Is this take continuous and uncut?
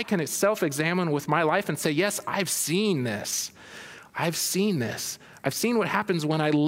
yes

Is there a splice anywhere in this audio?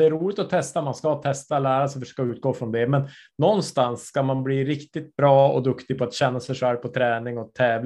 no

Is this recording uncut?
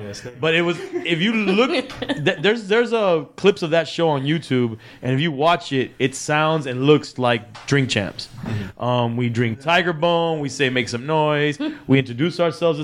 no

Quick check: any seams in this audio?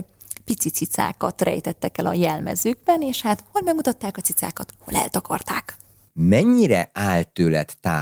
no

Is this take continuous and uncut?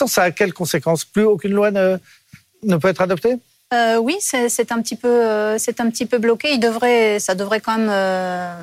yes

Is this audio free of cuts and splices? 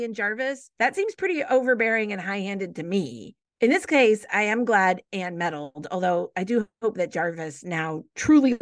yes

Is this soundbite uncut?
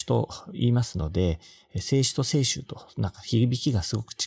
yes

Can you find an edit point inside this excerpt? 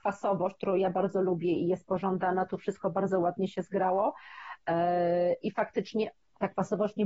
no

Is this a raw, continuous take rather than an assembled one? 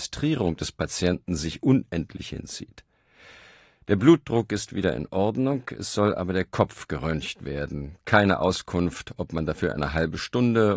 yes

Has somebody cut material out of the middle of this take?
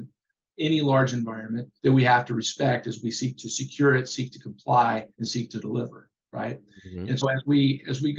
yes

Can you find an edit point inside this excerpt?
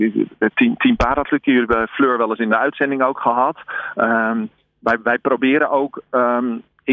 no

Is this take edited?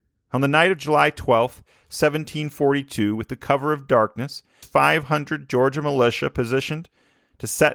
yes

